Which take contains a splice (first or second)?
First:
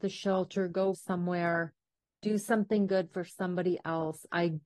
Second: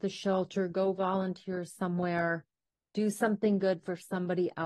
first